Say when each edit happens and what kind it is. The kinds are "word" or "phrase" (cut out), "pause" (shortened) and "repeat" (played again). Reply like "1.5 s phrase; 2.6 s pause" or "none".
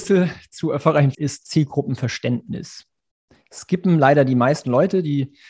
1.1 s word

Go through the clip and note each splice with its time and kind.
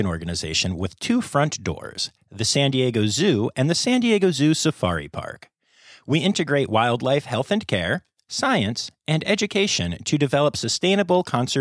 none

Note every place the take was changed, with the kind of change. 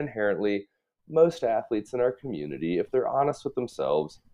none

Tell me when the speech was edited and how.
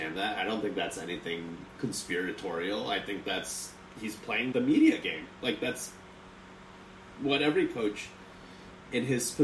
4.5 s word

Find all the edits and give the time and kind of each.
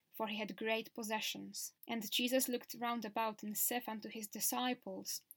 1.8 s pause

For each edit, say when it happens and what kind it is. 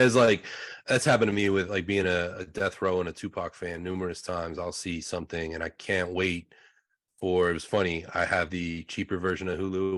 none

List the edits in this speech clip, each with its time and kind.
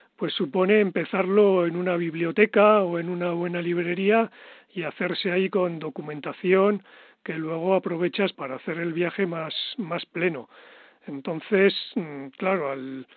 8.3 s word

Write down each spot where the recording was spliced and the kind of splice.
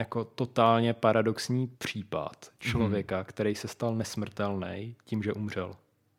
1.7 s pause

